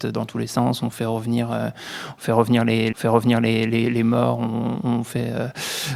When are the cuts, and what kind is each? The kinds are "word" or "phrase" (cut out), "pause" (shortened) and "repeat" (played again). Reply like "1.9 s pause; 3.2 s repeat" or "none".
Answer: 0.9 s word; 2.9 s repeat